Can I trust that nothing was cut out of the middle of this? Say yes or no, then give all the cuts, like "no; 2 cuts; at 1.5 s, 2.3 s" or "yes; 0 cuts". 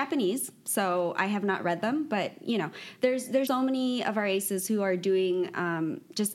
no; 1 cut; at 3.5 s